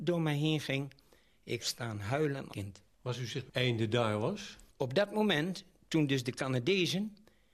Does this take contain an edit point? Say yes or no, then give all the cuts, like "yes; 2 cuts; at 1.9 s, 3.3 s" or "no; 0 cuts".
yes; 5 cuts; at 1.6 s, 2.5 s, 2.9 s, 3.5 s, 4.7 s